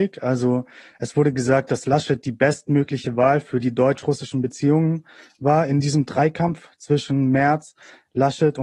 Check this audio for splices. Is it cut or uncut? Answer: uncut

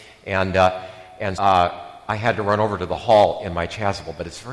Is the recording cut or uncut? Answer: cut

